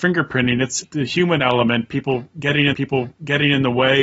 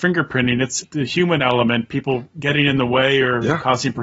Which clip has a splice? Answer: first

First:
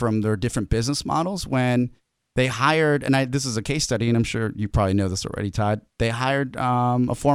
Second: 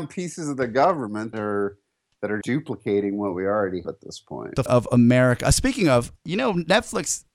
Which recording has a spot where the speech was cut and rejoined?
second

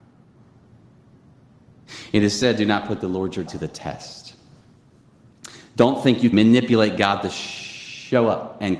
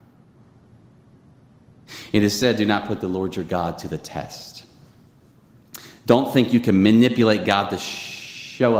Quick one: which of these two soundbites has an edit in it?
first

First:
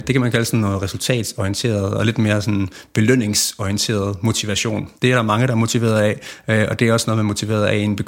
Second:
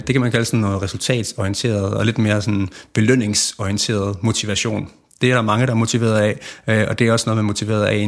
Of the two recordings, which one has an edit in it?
first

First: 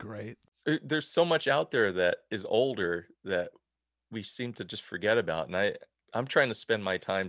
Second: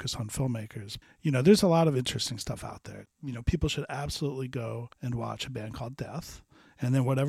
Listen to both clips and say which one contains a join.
second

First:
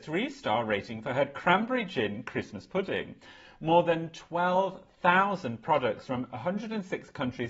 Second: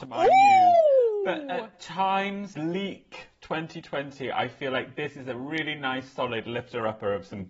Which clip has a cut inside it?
second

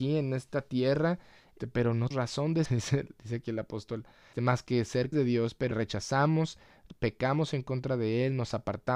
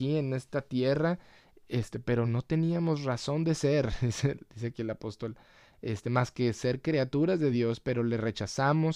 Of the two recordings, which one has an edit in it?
first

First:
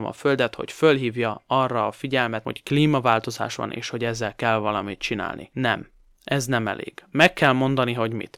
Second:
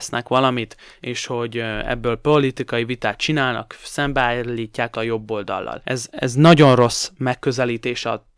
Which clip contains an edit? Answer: second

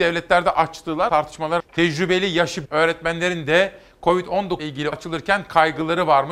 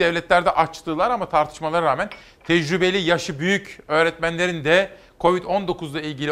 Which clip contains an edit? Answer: first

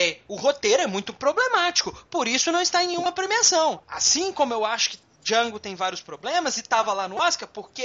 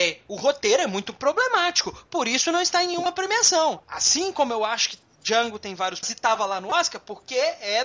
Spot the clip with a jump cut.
second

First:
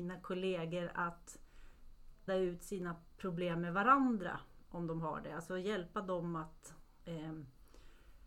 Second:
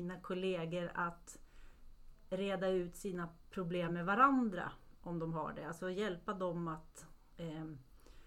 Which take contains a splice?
first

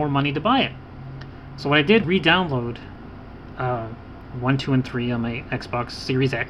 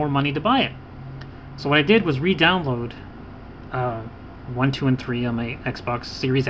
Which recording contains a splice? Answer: first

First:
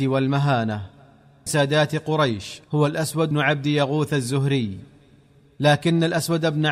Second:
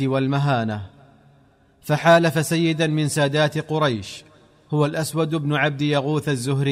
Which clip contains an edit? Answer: first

